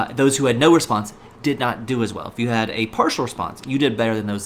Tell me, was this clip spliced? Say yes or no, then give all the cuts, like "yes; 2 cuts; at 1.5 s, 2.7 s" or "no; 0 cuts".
no; 0 cuts